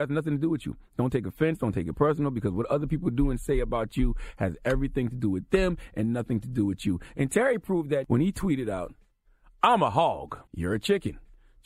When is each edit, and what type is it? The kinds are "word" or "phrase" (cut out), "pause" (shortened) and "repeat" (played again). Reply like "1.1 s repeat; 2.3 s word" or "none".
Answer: 10.5 s pause